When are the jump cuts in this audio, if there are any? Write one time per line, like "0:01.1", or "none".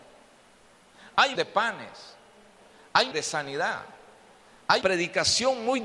0:01.4
0:03.1
0:04.8